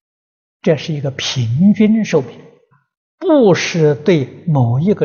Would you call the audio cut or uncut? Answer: cut